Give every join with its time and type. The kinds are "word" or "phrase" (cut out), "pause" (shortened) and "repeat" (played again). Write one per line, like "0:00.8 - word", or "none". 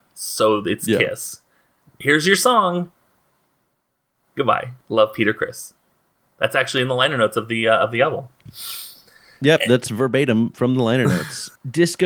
none